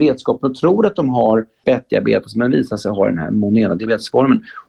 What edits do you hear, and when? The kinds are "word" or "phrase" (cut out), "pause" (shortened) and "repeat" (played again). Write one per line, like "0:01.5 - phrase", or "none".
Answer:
0:01.6 - word